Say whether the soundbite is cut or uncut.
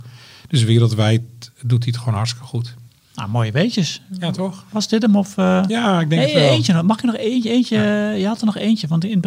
cut